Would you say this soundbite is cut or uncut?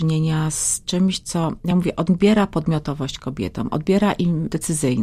uncut